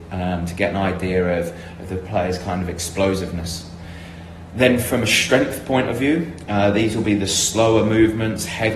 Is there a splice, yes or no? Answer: no